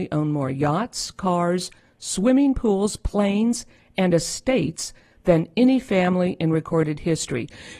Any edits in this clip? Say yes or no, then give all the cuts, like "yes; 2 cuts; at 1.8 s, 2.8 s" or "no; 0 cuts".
no; 0 cuts